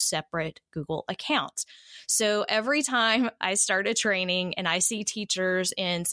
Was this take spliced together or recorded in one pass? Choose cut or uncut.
uncut